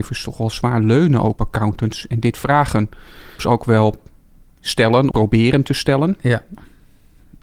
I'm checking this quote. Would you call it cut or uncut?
cut